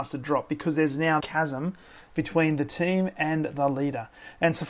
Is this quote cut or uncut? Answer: cut